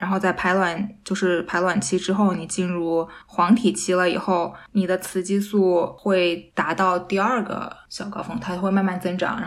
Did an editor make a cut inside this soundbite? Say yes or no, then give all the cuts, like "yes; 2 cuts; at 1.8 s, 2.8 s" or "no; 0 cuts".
yes; 1 cut; at 3.2 s